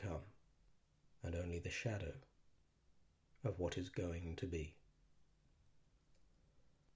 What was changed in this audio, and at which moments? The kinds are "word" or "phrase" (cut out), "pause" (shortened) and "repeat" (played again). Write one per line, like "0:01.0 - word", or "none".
none